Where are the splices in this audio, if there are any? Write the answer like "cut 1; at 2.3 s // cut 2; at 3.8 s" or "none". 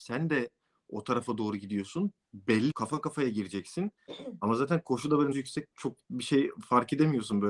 cut 1; at 2.7 s // cut 2; at 5.3 s // cut 3; at 5.7 s